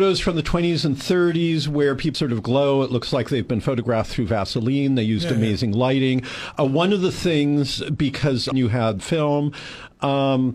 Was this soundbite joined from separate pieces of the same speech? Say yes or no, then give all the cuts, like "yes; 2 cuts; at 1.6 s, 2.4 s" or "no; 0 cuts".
yes; 3 cuts; at 2.1 s, 8.5 s, 9.0 s